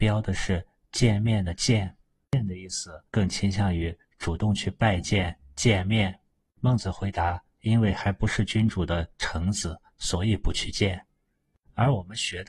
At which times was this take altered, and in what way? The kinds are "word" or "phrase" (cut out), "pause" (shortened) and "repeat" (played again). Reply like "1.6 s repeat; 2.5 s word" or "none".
3.1 s pause